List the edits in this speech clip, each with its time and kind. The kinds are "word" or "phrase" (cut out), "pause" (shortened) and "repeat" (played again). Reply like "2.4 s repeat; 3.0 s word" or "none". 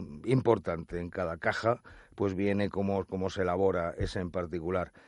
none

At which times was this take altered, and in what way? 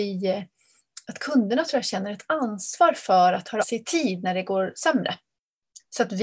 3.6 s word

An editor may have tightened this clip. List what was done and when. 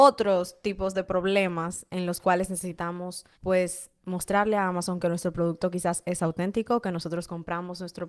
3.3 s pause

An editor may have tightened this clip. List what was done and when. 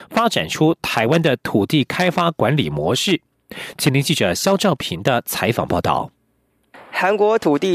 none

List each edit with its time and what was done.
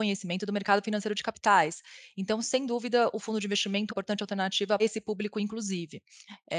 3.9 s phrase; 4.8 s word

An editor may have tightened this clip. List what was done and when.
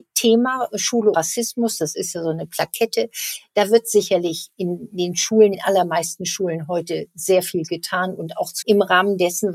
1.1 s word; 5.5 s word; 8.6 s phrase

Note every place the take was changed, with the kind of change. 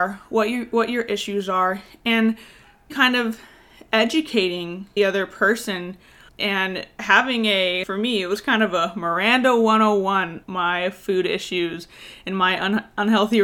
2.9 s word; 5.0 s word; 6.3 s word; 7.0 s word; 7.8 s word; 10.4 s word

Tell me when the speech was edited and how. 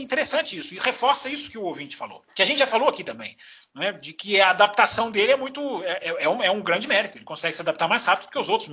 none

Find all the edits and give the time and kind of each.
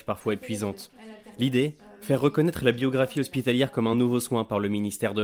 none

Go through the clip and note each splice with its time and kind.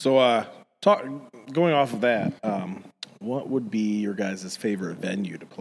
none

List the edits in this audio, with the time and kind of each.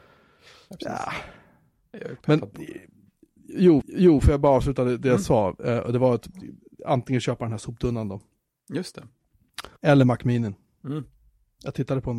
3.8 s repeat; 9.8 s pause

